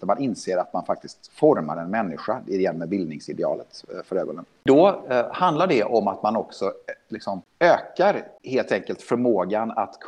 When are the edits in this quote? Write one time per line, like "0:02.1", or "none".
none